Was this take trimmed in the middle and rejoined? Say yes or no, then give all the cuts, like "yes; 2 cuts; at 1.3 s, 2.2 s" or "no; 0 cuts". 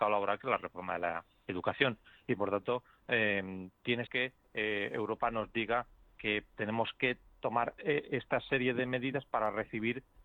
yes; 2 cuts; at 4.1 s, 7.8 s